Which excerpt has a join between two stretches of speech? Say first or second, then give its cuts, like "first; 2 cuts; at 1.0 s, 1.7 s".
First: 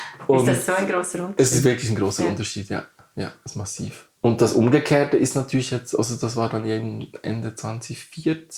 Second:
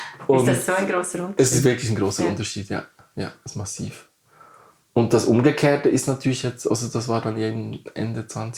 first; 1 cut; at 4.2 s